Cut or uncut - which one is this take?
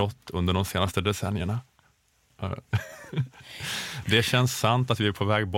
uncut